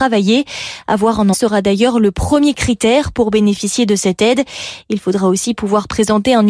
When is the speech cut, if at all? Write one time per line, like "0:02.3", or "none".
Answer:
0:01.3